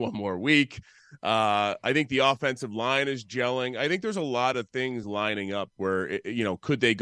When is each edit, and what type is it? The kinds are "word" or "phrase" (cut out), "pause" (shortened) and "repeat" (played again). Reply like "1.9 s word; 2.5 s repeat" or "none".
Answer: none